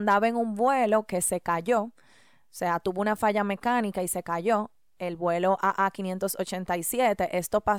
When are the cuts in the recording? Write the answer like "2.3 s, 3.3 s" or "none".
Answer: none